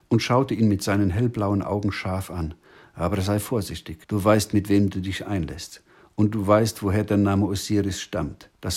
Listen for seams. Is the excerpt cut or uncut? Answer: cut